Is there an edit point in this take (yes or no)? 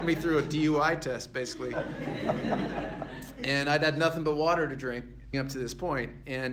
yes